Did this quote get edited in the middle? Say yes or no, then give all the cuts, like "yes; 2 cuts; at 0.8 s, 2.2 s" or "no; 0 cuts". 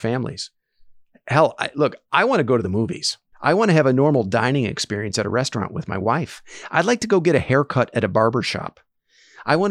yes; 1 cut; at 3.3 s